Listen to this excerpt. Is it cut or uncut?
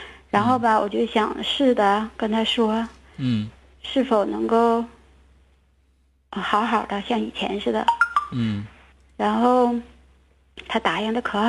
uncut